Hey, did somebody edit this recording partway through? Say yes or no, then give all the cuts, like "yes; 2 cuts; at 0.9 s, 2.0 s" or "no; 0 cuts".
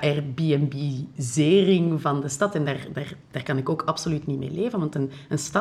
no; 0 cuts